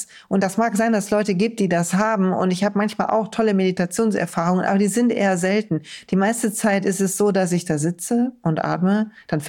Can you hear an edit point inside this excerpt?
no; 0 cuts

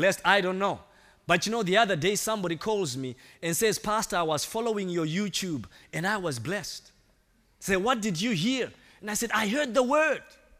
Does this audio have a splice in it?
no; 0 cuts

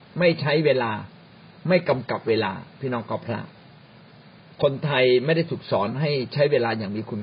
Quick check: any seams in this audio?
no; 0 cuts

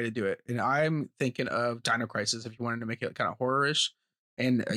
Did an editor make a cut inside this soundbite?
no; 0 cuts

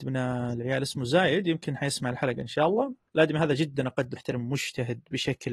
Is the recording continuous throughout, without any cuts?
no; 1 cut; at 4.2 s

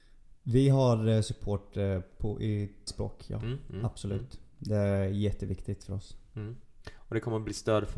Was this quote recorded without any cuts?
no; 1 cut; at 2.9 s

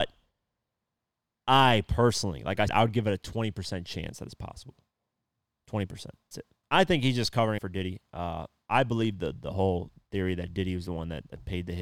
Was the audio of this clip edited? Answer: yes; 4 cuts; at 2.7 s, 6.3 s, 6.6 s, 7.6 s

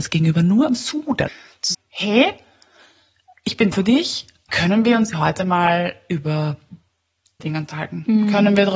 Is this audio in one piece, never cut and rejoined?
no; 6 cuts; at 1.3 s, 1.7 s, 3.7 s, 4.5 s, 5.1 s, 7.4 s

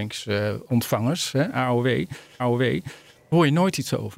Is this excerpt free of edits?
no; 1 cut; at 2.4 s

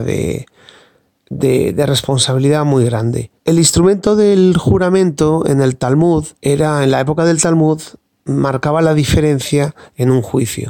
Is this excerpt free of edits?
no; 2 cuts; at 3.4 s, 6.3 s

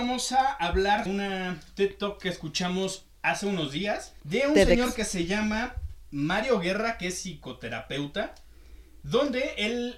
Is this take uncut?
no; 2 cuts; at 1.1 s, 4.2 s

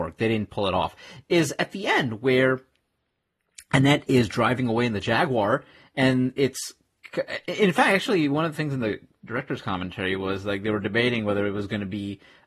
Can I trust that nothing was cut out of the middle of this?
yes; 0 cuts

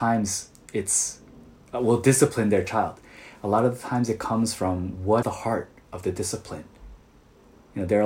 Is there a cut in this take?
yes; 1 cut; at 5.2 s

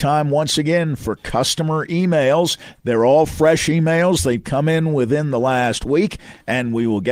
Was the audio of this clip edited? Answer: no; 0 cuts

